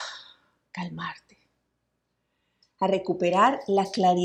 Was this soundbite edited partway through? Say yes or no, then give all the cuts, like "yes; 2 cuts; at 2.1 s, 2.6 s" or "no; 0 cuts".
no; 0 cuts